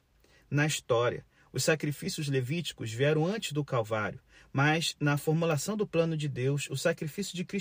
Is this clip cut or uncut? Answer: uncut